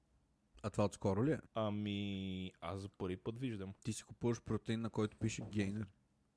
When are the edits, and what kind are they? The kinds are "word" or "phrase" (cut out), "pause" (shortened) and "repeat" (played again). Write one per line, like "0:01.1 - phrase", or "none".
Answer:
0:01.5 - pause
0:03.8 - pause